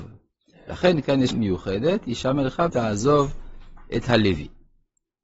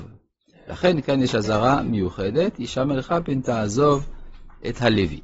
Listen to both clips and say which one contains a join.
first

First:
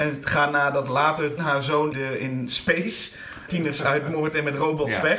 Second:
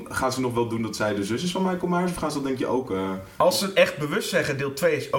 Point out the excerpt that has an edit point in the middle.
first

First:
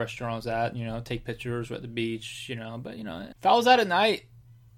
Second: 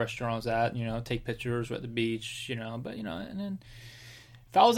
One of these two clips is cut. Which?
first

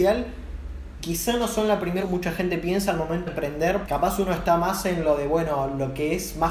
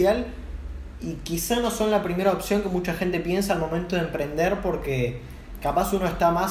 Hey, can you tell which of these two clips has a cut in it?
first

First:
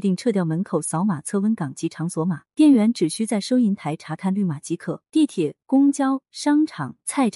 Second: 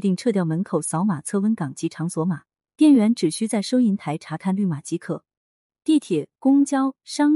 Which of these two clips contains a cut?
first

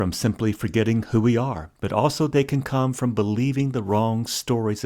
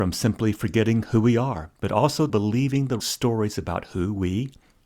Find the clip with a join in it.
second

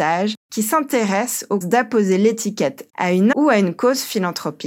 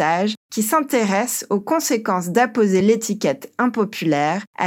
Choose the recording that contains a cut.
first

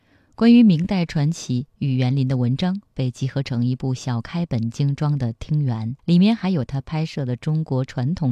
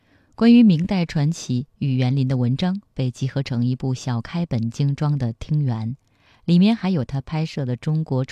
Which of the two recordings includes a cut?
first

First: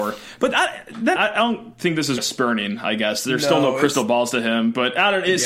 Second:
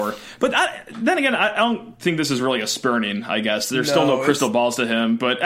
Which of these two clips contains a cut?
first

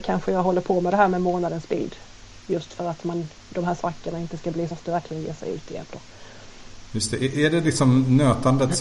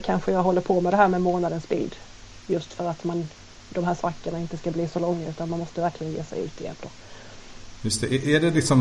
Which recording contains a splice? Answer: first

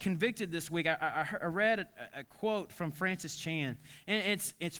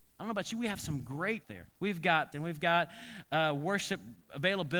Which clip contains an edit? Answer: second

